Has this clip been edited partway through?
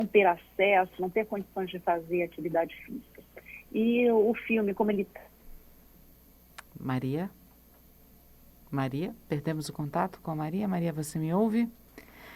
no; 0 cuts

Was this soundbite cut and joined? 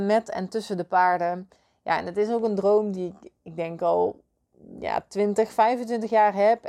no; 0 cuts

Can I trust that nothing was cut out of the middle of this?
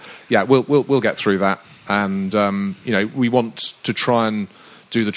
yes; 0 cuts

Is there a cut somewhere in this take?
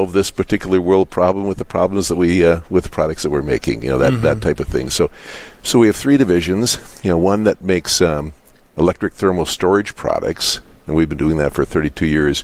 no; 0 cuts

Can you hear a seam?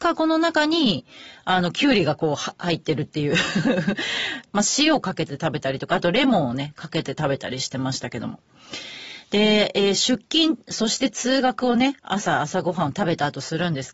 no; 0 cuts

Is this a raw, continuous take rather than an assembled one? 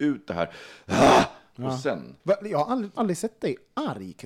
no; 2 cuts; at 2.2 s, 3.0 s

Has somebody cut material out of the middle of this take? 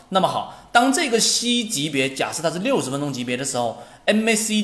no; 0 cuts

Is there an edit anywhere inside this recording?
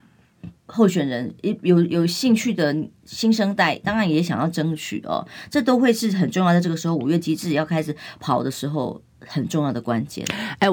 no; 0 cuts

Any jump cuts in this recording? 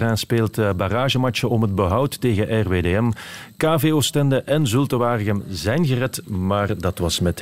no; 0 cuts

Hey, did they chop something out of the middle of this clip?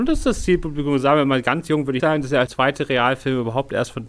yes; 2 cuts; at 2.0 s, 2.5 s

